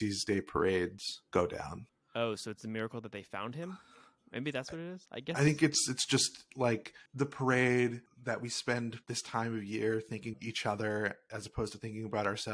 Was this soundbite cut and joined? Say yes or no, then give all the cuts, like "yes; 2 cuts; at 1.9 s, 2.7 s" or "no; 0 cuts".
yes; 3 cuts; at 1.3 s, 9.0 s, 10.3 s